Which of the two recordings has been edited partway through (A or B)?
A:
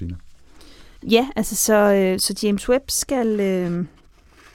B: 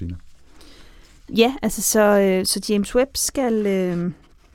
A